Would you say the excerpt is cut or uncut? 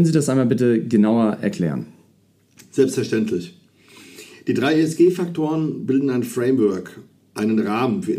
uncut